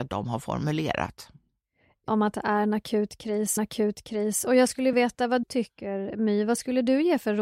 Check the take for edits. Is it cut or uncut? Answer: cut